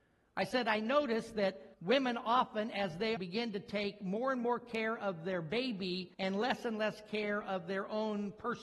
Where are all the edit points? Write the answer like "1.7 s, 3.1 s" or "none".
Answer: 1.7 s, 3.2 s, 6.1 s